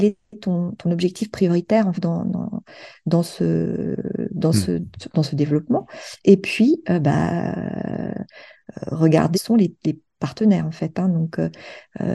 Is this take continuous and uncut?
no; 2 cuts; at 1.9 s, 9.3 s

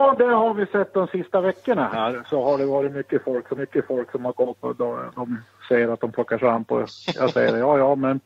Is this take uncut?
no; 2 cuts; at 3.6 s, 4.6 s

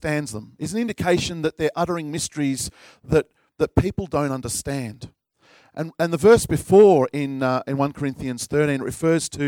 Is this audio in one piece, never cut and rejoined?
yes; 0 cuts

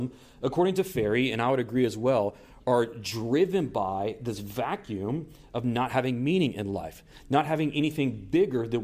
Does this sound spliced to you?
no; 0 cuts

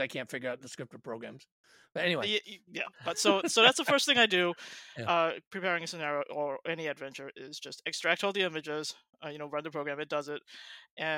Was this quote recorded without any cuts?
yes; 0 cuts

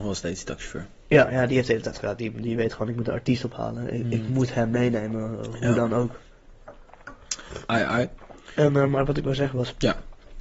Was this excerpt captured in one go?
yes; 0 cuts

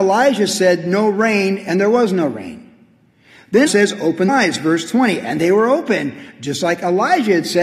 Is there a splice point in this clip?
yes; 2 cuts; at 3.7 s, 4.3 s

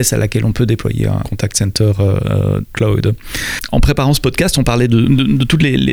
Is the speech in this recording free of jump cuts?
no; 2 cuts; at 1.2 s, 2.6 s

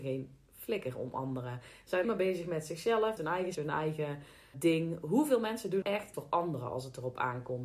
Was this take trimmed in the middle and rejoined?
yes; 6 cuts; at 2.0 s, 3.2 s, 3.5 s, 4.5 s, 5.8 s, 6.1 s

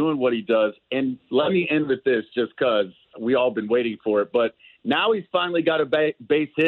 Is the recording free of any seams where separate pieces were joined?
yes; 0 cuts

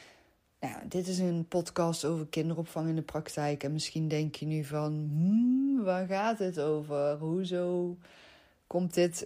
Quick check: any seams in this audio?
no; 0 cuts

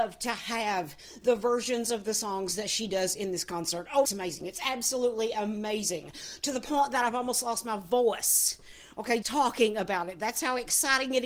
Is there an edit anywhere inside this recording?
yes; 2 cuts; at 4.0 s, 9.2 s

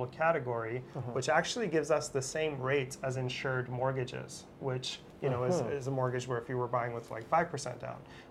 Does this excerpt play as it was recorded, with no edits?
yes; 0 cuts

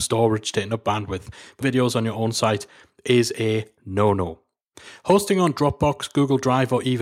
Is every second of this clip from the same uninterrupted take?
no; 1 cut; at 1.6 s

